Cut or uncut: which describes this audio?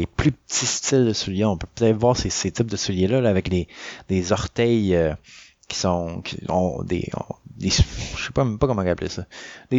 uncut